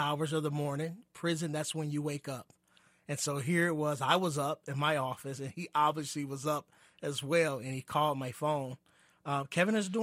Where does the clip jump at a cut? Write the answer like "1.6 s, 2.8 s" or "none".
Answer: none